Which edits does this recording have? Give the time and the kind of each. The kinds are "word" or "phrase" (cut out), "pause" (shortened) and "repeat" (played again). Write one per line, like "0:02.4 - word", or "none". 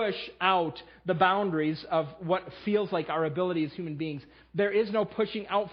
none